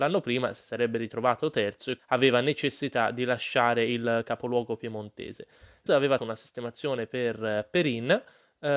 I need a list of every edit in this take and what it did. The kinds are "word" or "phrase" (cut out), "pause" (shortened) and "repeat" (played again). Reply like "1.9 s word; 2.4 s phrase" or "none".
2.0 s word; 5.9 s word; 6.2 s word